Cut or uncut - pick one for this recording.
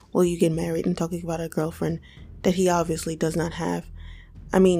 uncut